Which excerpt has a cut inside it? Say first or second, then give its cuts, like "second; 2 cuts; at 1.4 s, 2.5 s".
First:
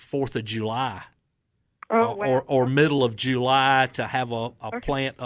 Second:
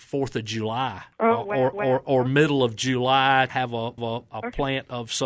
second; 4 cuts; at 1.1 s, 1.7 s, 3.5 s, 4.0 s